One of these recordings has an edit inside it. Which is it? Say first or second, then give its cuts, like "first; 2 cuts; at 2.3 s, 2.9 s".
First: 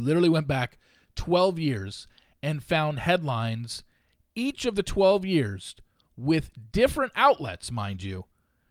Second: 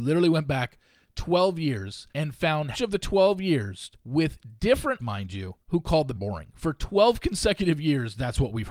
second; 6 cuts; at 2.1 s, 2.7 s, 3.9 s, 5.0 s, 5.6 s, 6.1 s